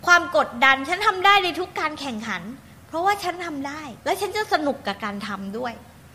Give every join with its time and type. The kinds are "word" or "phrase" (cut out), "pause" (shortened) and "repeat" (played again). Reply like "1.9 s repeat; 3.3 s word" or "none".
4.0 s pause